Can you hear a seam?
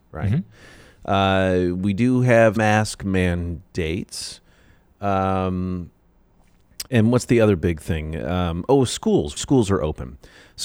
yes; 3 cuts; at 2.6 s, 6.9 s, 9.4 s

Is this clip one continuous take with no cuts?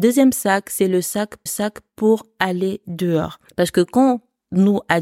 no; 1 cut; at 1.5 s

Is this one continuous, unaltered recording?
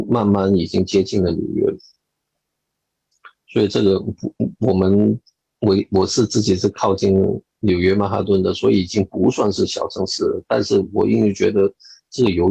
yes; 0 cuts

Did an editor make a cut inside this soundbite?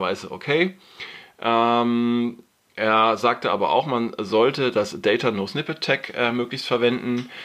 no; 0 cuts

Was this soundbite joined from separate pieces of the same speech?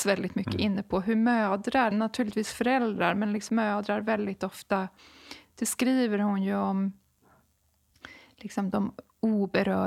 yes; 2 cuts; at 1.9 s, 3.5 s

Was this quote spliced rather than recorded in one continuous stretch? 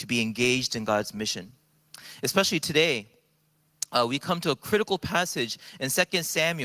no; 0 cuts

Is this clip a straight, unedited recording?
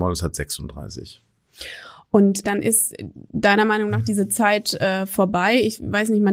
no; 1 cut; at 2.4 s

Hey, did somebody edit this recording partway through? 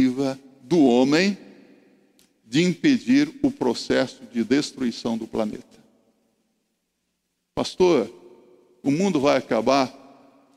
no; 0 cuts

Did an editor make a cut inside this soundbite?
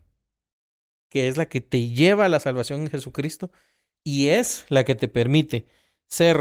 no; 0 cuts

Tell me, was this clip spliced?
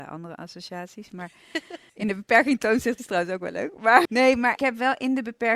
yes; 4 cuts; at 1.9 s, 3.0 s, 4.0 s, 4.6 s

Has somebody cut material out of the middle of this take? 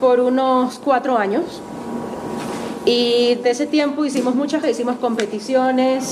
yes; 2 cuts; at 3.4 s, 4.6 s

